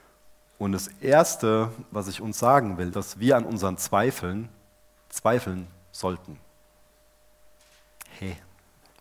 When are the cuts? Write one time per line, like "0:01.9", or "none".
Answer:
0:02.9